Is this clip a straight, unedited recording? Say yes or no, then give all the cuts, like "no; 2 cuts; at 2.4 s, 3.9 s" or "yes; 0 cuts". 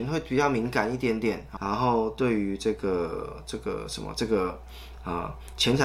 no; 1 cut; at 1.6 s